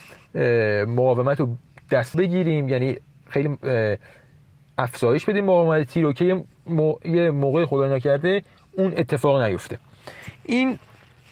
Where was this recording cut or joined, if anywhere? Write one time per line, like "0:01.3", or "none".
0:02.1